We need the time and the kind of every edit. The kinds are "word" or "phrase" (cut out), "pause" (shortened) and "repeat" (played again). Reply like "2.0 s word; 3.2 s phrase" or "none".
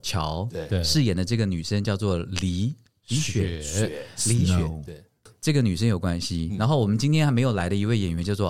none